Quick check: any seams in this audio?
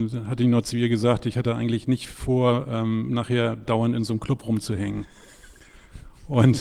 no; 0 cuts

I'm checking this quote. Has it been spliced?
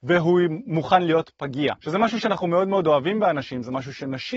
yes; 1 cut; at 1.8 s

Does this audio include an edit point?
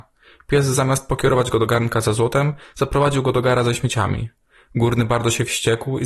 no; 0 cuts

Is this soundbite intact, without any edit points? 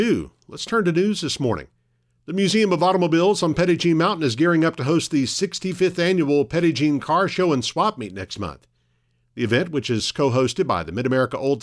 yes; 0 cuts

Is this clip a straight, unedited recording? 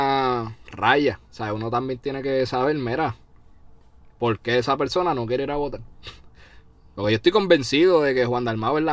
yes; 0 cuts

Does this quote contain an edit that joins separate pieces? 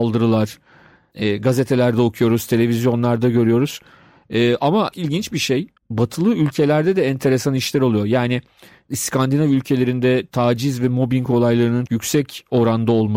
yes; 3 cuts; at 4.9 s, 5.8 s, 11.9 s

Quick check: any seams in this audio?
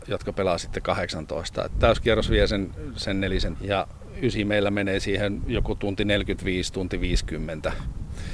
yes; 1 cut; at 3.6 s

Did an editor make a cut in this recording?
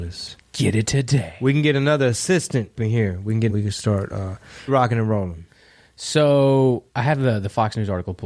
yes; 4 cuts; at 2.8 s, 3.5 s, 4.7 s, 6.9 s

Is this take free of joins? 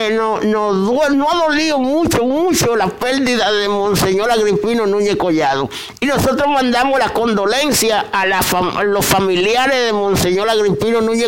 yes; 0 cuts

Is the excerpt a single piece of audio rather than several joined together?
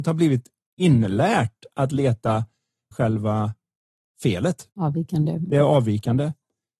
no; 1 cut; at 2.9 s

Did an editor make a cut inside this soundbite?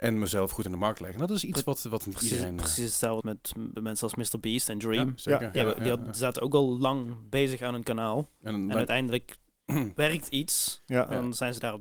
yes; 1 cut; at 3.2 s

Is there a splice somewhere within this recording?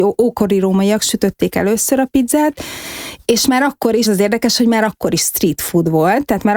yes; 1 cut; at 4.0 s

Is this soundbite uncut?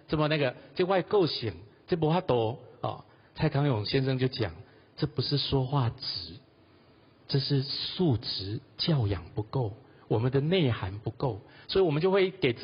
yes; 0 cuts

